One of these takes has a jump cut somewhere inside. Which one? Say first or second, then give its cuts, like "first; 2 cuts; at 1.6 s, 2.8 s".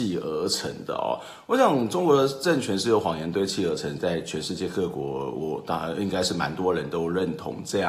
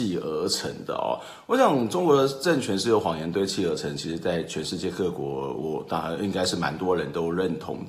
first; 1 cut; at 4.0 s